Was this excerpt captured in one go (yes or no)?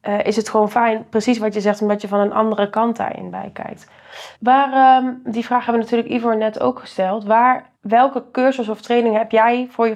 no